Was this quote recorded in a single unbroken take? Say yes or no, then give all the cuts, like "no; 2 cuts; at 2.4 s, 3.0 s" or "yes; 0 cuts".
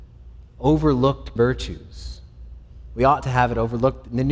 no; 2 cuts; at 1.4 s, 3.2 s